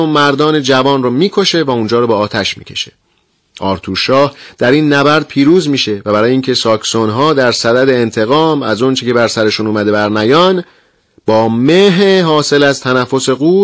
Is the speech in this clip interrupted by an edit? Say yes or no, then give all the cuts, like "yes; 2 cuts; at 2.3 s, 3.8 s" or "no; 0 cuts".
no; 0 cuts